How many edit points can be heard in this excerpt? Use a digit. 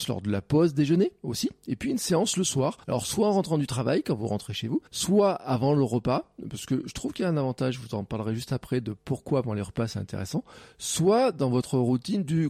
2